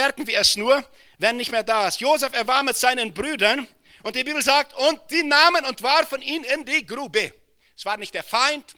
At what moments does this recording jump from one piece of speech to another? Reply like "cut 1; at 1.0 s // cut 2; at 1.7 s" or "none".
none